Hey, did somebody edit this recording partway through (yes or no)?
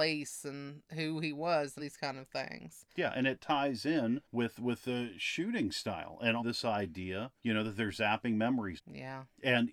yes